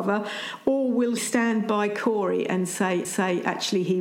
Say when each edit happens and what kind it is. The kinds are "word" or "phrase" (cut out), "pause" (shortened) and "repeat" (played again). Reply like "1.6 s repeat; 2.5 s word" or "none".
1.2 s word; 3.0 s repeat

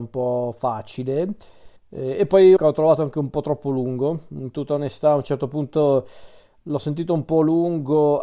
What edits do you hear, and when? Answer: 1.8 s pause; 2.6 s phrase

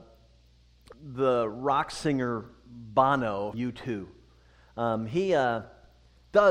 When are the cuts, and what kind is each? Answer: 0.9 s word; 3.5 s word

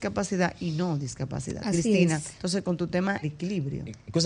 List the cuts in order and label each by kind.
2.3 s pause; 3.2 s word

